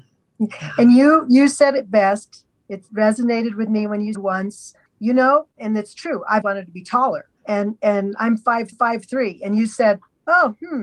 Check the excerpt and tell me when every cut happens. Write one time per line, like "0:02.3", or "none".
0:04.1
0:04.9
0:05.6
0:06.4
0:07.3
0:08.7